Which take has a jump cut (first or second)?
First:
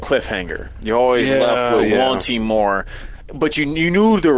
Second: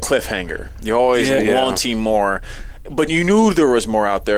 second